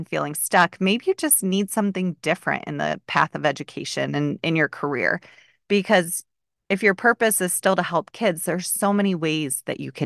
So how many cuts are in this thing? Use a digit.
0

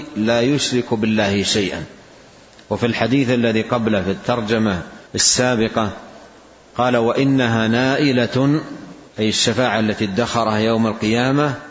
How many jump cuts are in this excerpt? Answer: 2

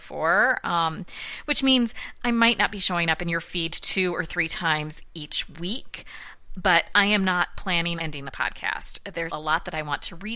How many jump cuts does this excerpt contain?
2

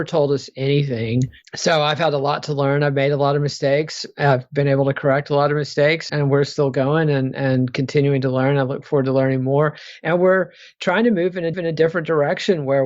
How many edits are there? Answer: 2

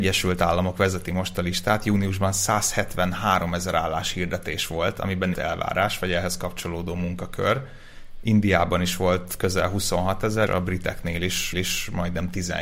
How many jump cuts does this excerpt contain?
3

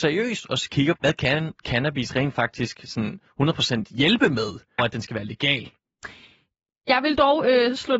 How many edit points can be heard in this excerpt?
2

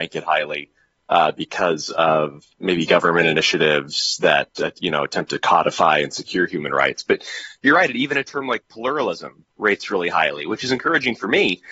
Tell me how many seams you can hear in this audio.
1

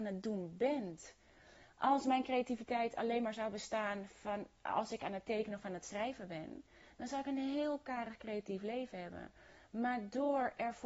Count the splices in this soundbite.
0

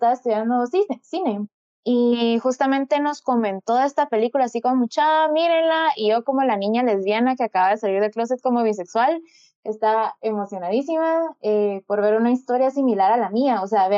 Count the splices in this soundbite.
0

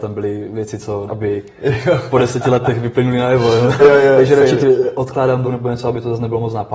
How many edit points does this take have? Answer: 4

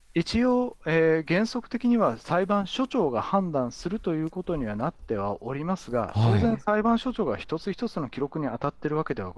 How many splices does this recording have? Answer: 0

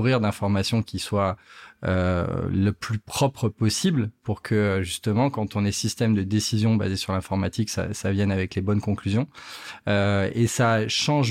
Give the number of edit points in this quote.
0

